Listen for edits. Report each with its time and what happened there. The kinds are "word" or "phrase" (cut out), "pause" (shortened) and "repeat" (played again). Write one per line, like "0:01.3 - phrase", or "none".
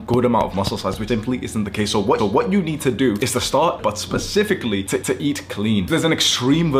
0:01.1 - word
0:02.2 - repeat
0:03.8 - phrase
0:05.0 - repeat
0:05.9 - word